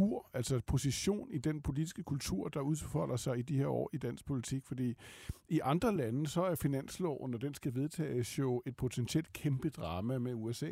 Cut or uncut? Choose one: uncut